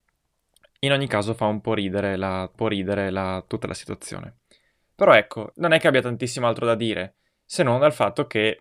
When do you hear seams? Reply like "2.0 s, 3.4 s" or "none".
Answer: 2.5 s, 5.5 s